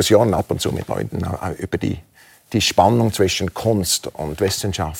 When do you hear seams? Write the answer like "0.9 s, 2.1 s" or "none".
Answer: none